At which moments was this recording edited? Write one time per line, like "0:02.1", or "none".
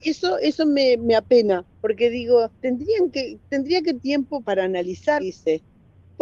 0:01.7
0:02.6
0:04.0
0:04.4
0:05.2